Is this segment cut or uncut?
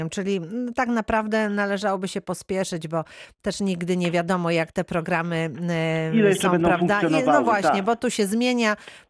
uncut